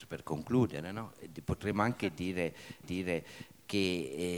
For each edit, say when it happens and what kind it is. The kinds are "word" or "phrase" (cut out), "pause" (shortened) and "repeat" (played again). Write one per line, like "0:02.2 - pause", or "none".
0:02.8 - repeat